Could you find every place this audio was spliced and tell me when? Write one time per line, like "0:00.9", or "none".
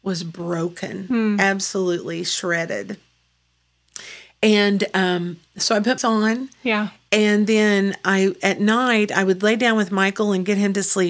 0:06.0